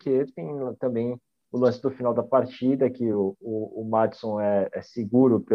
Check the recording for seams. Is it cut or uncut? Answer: uncut